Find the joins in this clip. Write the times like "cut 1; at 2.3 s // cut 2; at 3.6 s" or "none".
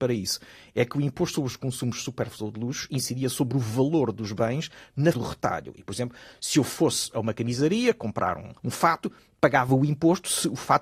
cut 1; at 5.1 s // cut 2; at 8.6 s